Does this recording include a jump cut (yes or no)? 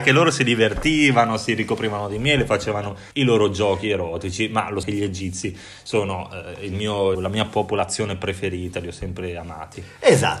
yes